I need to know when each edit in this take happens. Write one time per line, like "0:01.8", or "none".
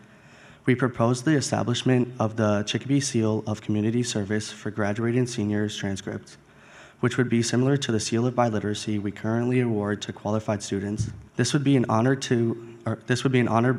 0:11.3

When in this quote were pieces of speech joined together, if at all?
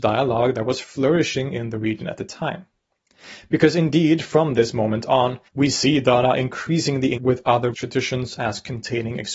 0:05.5
0:07.2
0:07.7

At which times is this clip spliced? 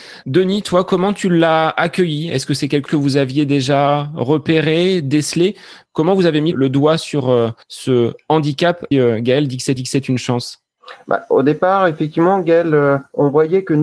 0:02.9
0:06.5
0:07.6
0:08.9
0:09.8

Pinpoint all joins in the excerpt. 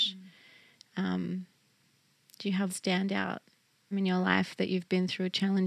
0:02.7
0:03.9

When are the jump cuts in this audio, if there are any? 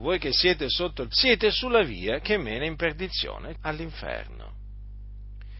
0:01.1
0:03.6

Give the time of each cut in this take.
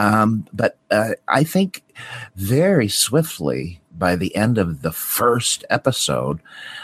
none

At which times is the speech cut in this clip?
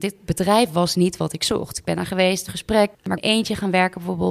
0:02.5
0:03.2

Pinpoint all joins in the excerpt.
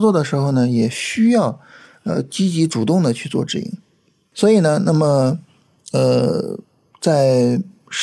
none

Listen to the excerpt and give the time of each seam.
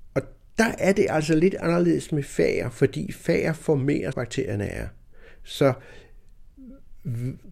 0:04.1

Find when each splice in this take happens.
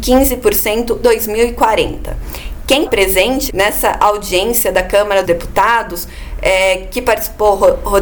0:01.0
0:02.8
0:03.5
0:05.2

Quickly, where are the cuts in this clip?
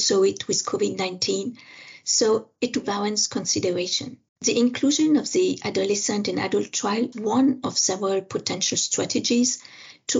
0:02.8
0:04.3
0:07.1

